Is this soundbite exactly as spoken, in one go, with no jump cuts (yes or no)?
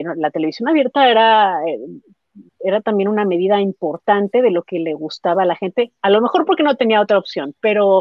no